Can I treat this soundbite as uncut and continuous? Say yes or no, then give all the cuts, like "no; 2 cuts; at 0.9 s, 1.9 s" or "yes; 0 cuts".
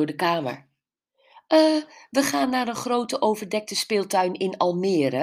yes; 0 cuts